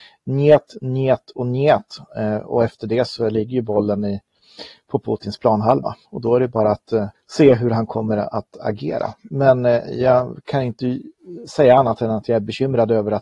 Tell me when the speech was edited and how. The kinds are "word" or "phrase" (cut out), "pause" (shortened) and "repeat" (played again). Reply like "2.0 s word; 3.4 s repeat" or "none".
6.1 s pause; 7.1 s pause